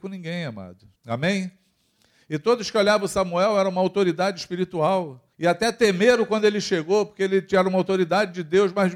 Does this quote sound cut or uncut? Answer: cut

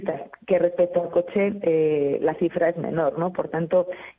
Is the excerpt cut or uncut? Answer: uncut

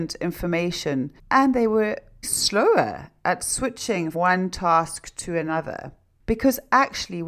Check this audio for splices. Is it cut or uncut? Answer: cut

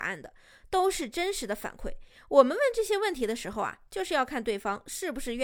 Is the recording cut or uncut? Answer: uncut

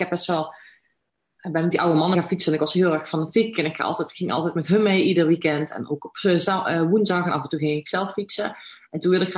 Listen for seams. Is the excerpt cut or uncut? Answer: cut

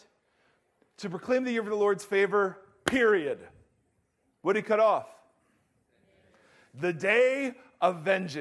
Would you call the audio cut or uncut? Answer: uncut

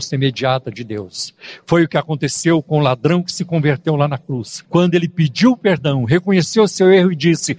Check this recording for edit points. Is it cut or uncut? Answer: cut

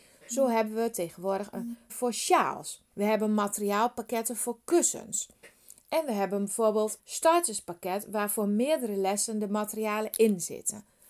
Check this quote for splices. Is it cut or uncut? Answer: cut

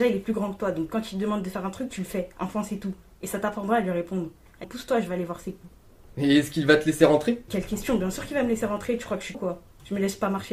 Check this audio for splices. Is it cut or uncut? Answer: cut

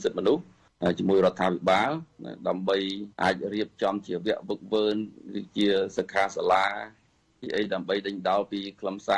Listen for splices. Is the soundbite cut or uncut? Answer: cut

